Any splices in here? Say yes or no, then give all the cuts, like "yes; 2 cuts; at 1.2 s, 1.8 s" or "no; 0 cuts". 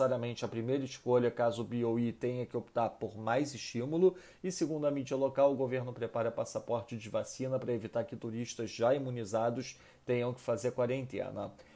no; 0 cuts